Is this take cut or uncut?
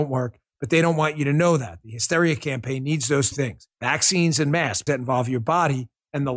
cut